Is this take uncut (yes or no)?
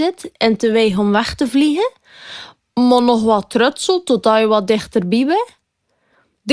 yes